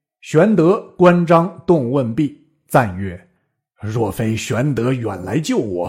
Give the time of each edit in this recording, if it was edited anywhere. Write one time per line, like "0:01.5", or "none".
0:03.4